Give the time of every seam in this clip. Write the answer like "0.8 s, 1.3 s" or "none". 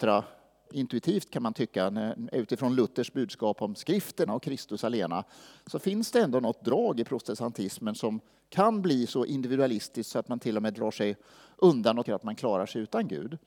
4.3 s, 12.1 s